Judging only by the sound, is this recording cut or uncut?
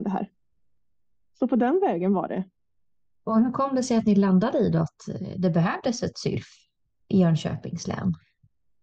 uncut